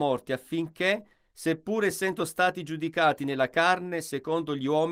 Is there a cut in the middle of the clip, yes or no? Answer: no